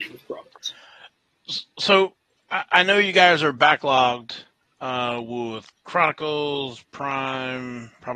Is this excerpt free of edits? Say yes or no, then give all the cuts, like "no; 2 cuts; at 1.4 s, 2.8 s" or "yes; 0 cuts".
yes; 0 cuts